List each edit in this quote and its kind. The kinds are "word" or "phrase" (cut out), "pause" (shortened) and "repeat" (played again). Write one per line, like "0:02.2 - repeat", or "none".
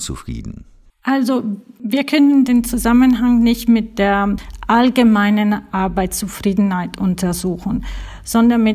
none